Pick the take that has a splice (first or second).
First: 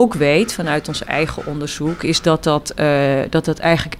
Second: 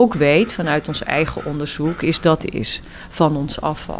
second